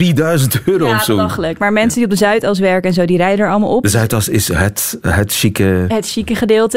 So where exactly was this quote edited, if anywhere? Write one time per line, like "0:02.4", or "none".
none